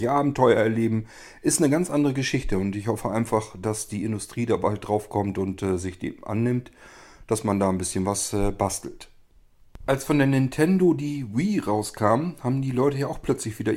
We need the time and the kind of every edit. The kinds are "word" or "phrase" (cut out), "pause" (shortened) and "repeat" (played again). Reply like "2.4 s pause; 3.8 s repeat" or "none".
none